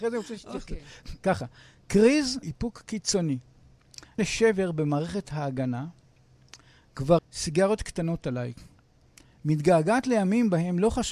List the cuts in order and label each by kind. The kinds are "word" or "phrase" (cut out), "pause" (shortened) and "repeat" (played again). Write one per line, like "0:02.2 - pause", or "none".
0:02.4 - word
0:04.2 - word
0:07.2 - phrase